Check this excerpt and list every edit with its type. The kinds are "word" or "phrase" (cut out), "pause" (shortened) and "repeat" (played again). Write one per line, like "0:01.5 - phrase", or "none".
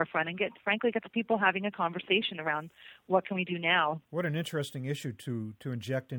0:04.0 - pause